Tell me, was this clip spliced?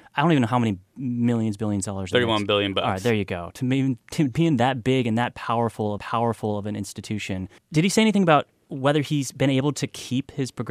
yes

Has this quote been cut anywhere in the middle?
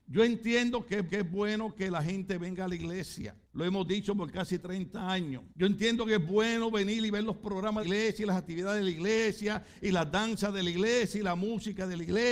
yes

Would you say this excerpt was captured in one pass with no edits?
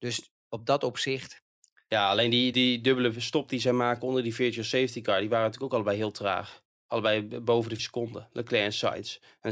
no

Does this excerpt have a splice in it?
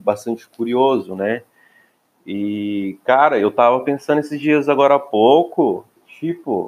no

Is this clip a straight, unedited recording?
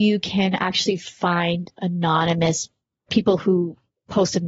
no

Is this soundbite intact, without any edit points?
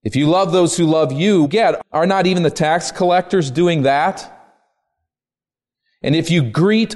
no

